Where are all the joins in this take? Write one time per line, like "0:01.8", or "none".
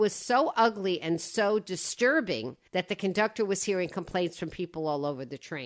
0:02.7